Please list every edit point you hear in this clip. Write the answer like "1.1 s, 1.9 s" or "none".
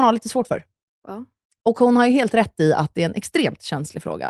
none